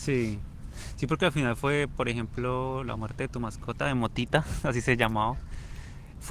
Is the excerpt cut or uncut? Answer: uncut